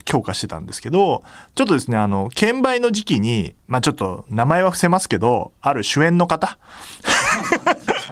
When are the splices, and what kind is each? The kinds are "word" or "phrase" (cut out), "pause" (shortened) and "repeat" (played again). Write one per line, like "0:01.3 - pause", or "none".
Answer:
0:03.6 - pause